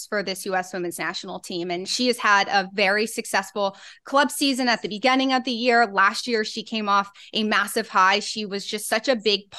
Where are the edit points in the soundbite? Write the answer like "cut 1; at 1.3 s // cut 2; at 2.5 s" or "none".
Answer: none

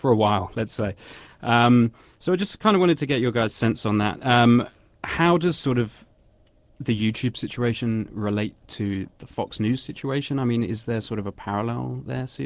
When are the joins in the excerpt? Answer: none

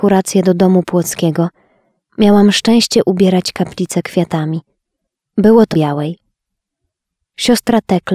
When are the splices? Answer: cut 1; at 5.7 s

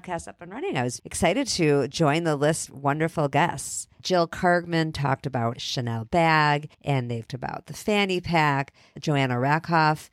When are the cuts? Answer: cut 1; at 1.0 s // cut 2; at 2.7 s // cut 3; at 3.9 s // cut 4; at 5.6 s // cut 5; at 6.7 s // cut 6; at 7.3 s

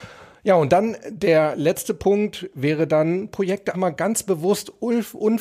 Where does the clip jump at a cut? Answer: cut 1; at 3.7 s

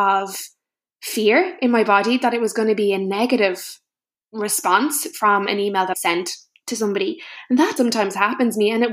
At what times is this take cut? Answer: cut 1; at 5.9 s // cut 2; at 7.8 s

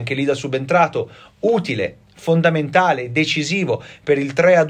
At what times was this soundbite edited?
none

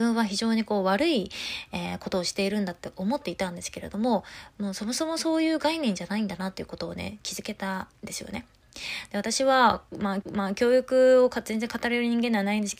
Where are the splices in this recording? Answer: cut 1; at 10.2 s

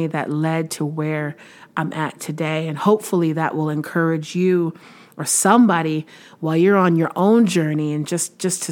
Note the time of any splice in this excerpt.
none

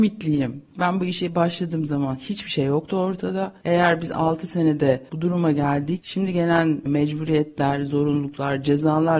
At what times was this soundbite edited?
cut 1; at 6.0 s

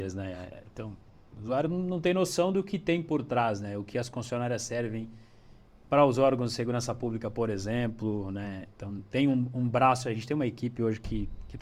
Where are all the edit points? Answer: none

